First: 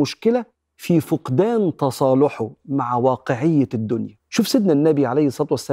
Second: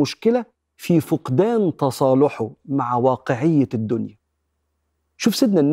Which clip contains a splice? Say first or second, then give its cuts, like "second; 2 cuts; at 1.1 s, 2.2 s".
first; 1 cut; at 4.2 s